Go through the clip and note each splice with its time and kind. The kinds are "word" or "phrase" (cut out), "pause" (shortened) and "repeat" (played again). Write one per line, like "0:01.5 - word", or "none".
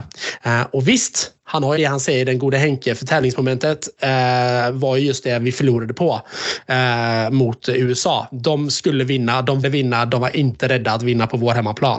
0:01.8 - phrase
0:09.6 - word